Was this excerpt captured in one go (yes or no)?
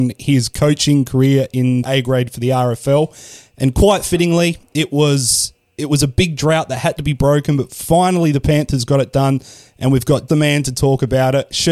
no